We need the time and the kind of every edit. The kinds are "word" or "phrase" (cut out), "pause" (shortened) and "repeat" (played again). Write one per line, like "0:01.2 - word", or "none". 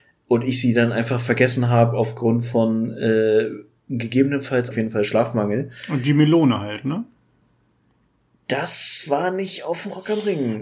0:04.7 - phrase